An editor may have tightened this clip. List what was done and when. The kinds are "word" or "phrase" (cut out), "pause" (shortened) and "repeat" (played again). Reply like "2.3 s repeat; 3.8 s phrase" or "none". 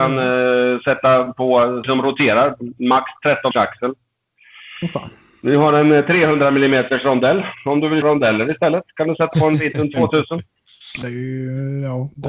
1.8 s word; 3.5 s word; 8.0 s word; 9.3 s word; 11.0 s word